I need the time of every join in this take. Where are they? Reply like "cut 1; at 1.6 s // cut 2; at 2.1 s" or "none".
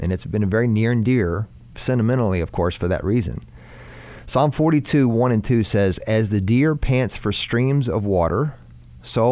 none